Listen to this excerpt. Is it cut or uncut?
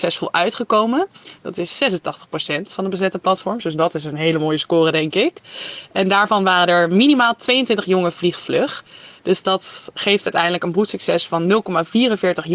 uncut